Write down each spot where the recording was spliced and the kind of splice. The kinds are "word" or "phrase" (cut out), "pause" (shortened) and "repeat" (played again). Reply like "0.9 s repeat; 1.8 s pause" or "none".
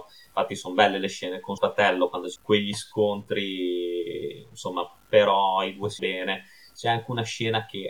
1.6 s word; 2.4 s word; 6.0 s word